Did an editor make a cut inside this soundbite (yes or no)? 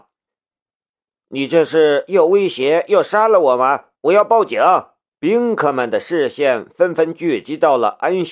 yes